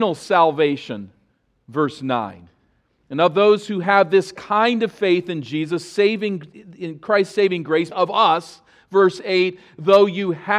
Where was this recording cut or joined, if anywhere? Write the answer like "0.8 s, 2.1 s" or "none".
7.9 s